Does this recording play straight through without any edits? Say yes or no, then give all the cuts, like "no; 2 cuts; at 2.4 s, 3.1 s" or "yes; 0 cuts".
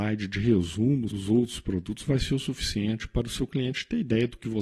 no; 1 cut; at 1.1 s